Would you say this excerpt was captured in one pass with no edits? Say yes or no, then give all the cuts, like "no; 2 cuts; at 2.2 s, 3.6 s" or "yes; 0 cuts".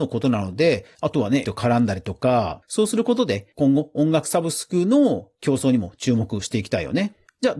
no; 1 cut; at 1.4 s